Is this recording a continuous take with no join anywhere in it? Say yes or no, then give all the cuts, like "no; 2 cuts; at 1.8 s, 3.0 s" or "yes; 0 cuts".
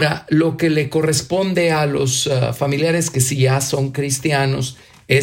yes; 0 cuts